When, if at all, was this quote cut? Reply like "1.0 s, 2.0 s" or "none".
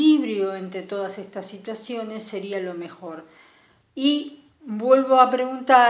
none